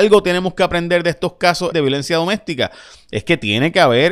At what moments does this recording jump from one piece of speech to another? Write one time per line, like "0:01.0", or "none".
0:01.7